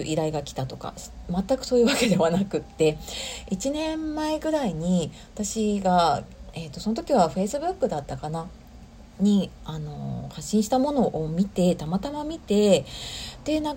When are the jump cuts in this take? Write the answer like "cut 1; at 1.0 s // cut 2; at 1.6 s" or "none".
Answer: cut 1; at 9.1 s

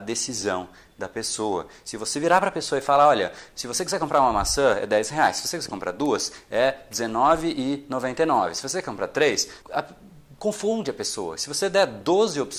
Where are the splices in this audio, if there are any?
cut 1; at 9.6 s

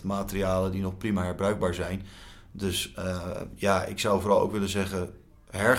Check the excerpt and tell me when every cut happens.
none

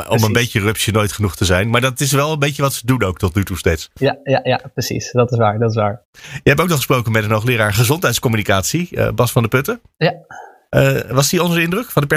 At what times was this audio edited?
none

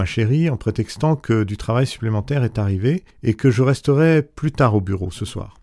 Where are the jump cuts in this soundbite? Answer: cut 1; at 3.1 s

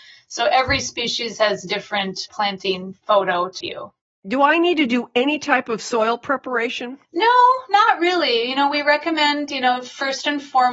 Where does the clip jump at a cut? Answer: cut 1; at 3.6 s // cut 2; at 7.0 s

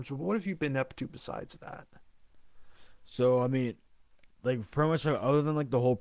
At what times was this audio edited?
none

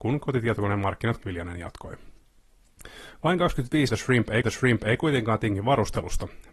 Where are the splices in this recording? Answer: cut 1; at 1.2 s // cut 2; at 3.9 s // cut 3; at 4.4 s

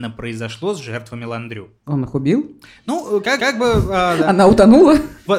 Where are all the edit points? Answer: cut 1; at 1.8 s // cut 2; at 3.4 s

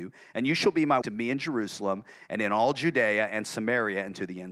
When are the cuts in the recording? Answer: cut 1; at 1.0 s

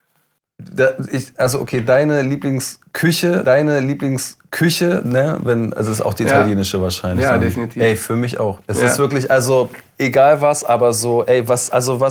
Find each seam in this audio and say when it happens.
cut 1; at 3.4 s

